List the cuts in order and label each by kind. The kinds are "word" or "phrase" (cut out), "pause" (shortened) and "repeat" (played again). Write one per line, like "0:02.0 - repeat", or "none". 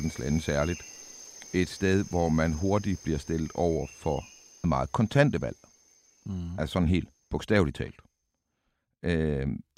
0:04.6 - word